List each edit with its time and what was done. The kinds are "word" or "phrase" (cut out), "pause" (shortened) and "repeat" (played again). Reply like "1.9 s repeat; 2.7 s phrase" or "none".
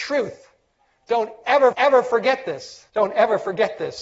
1.7 s repeat; 2.9 s pause